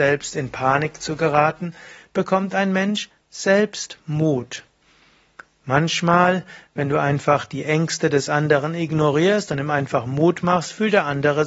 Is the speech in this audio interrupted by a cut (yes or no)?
no